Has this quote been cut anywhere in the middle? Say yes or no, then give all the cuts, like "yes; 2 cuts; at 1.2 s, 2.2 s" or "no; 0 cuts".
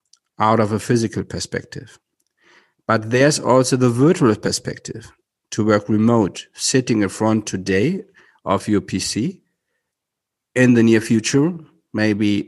no; 0 cuts